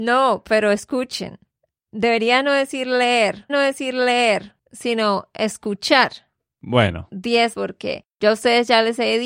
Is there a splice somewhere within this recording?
yes; 2 cuts; at 3.5 s, 7.5 s

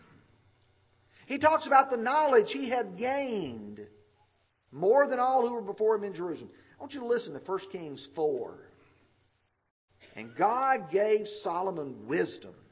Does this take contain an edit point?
no; 0 cuts

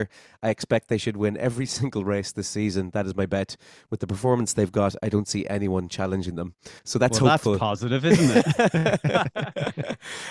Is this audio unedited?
no; 1 cut; at 6.8 s

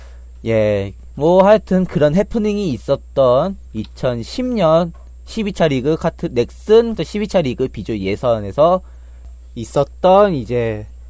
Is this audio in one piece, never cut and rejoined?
no; 3 cuts; at 1.1 s, 3.7 s, 7.0 s

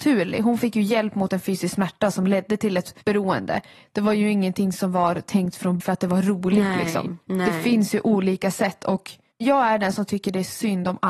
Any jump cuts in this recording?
yes; 4 cuts; at 3.0 s, 5.8 s, 7.2 s, 9.3 s

